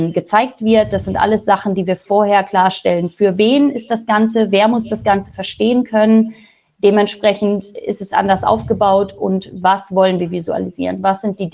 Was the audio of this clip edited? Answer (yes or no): no